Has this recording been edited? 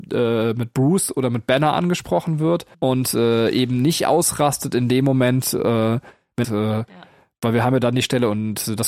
yes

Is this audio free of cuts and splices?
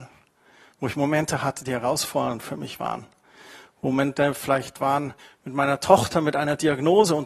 no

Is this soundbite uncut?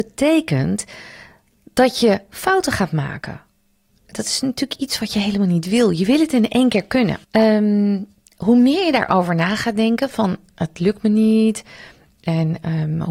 no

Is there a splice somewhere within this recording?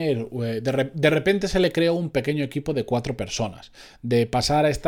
no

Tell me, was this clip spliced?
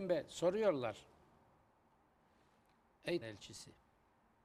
yes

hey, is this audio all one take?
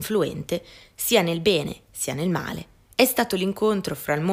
yes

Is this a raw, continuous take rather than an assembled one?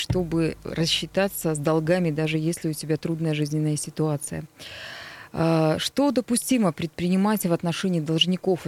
yes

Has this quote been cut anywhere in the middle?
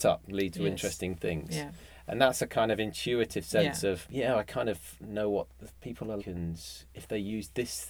yes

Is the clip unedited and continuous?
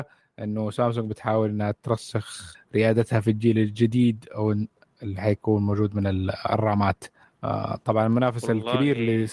yes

